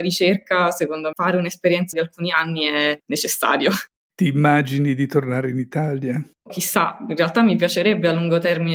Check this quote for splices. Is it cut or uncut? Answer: cut